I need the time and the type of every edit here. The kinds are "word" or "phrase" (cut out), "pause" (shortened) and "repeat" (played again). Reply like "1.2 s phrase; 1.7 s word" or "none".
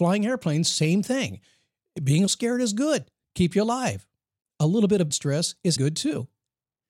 2.3 s word; 4.4 s pause; 5.1 s word; 5.8 s word